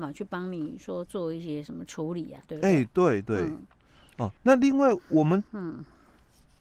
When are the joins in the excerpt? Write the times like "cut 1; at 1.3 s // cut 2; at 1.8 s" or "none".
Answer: cut 1; at 4.4 s // cut 2; at 5.5 s